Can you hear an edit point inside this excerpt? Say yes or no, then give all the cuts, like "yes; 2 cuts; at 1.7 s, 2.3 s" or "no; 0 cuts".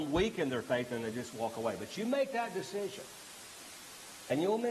no; 0 cuts